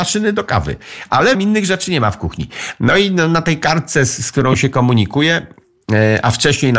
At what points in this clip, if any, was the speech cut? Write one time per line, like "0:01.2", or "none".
0:01.3